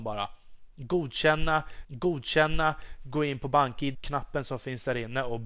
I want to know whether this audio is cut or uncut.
cut